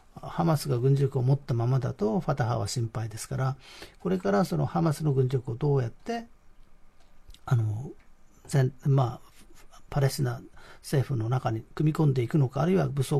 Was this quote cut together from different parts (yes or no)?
no